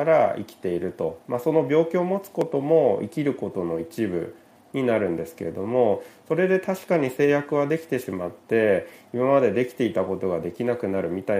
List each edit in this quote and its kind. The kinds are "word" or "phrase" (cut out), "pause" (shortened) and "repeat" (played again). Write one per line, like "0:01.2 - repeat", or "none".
none